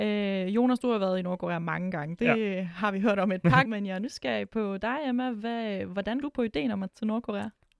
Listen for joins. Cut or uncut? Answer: cut